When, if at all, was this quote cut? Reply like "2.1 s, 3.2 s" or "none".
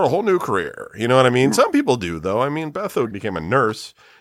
3.1 s

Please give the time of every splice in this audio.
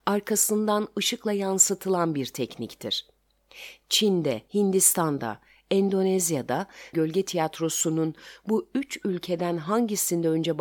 4.5 s, 6.9 s

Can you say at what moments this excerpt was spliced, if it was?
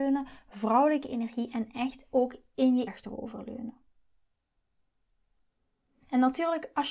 2.9 s

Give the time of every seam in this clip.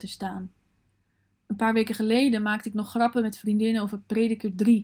none

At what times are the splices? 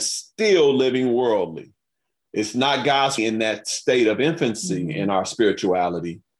3.2 s

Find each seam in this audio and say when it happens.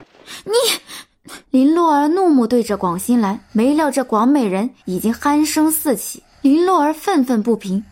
1.4 s, 3.5 s, 4.8 s, 6.3 s

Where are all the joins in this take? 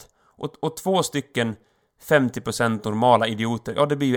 none

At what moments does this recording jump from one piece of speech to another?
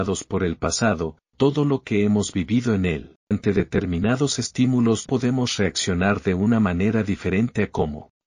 1.3 s, 3.3 s, 5.1 s

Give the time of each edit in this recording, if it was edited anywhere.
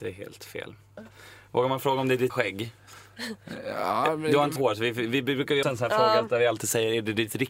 2.3 s, 4.6 s, 5.6 s

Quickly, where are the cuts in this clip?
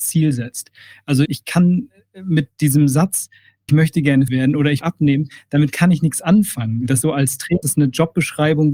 1.3 s, 3.7 s, 4.3 s, 4.8 s, 7.0 s, 7.6 s

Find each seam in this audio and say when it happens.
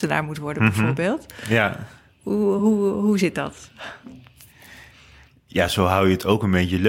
none

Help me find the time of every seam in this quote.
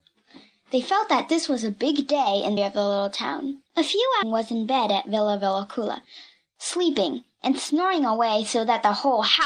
2.6 s, 3.7 s, 4.2 s

